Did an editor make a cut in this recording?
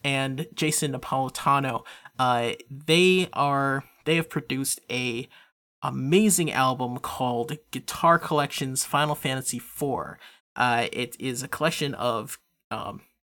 no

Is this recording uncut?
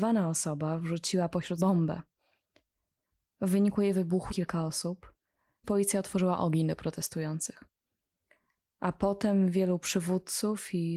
no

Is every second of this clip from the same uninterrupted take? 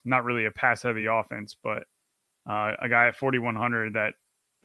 yes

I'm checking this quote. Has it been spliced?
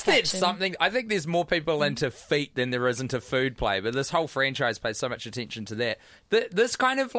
no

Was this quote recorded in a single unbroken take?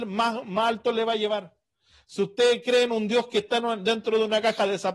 yes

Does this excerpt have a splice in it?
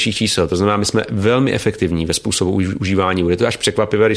no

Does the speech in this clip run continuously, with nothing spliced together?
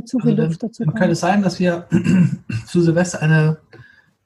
yes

